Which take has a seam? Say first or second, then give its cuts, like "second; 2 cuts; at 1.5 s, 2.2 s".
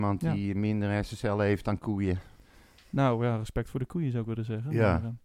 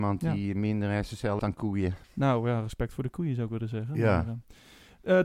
second; 2 cuts; at 1.4 s, 2.0 s